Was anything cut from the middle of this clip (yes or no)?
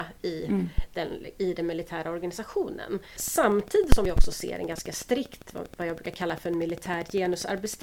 no